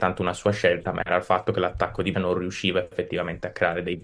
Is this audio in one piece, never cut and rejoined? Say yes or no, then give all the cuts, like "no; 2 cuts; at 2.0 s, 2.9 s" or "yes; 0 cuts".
no; 1 cut; at 2.1 s